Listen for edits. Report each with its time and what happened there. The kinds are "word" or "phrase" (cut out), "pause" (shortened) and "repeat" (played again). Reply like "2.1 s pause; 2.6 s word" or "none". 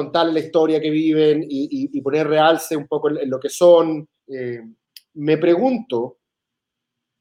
4.2 s pause